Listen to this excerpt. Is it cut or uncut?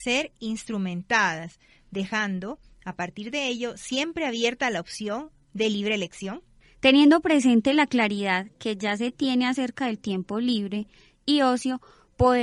uncut